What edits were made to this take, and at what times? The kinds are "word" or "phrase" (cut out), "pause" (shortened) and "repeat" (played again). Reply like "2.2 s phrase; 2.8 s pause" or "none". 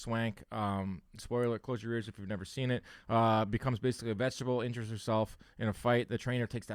none